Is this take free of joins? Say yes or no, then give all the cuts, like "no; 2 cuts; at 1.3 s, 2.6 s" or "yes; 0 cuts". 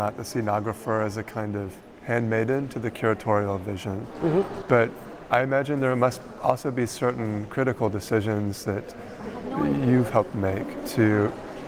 yes; 0 cuts